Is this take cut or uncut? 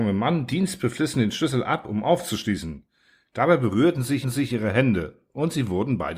cut